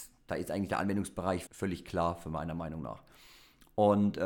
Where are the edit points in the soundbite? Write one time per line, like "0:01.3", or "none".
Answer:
0:01.5